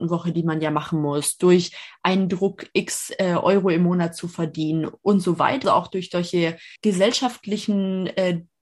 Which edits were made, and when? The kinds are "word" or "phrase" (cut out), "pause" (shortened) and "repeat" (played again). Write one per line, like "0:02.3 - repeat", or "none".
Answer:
0:05.6 - word
0:06.8 - pause